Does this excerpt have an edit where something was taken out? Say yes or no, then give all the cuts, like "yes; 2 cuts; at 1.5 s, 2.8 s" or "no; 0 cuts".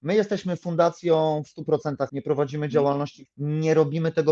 yes; 2 cuts; at 2.1 s, 3.3 s